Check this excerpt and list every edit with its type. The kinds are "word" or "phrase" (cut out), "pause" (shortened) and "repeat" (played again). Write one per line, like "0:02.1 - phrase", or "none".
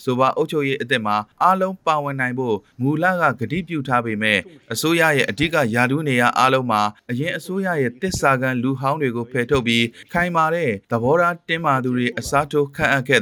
0:10.8 - pause